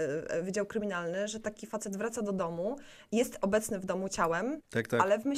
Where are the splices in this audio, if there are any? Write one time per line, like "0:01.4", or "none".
none